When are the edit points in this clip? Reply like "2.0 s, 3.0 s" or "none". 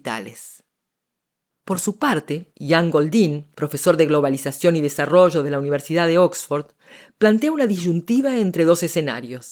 2.5 s, 3.5 s